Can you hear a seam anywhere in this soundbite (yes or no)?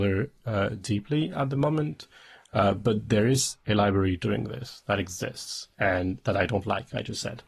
yes